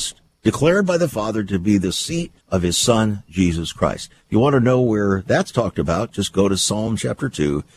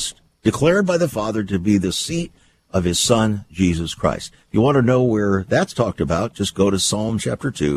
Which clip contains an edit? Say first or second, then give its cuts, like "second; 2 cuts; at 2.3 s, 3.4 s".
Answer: first; 1 cut; at 2.4 s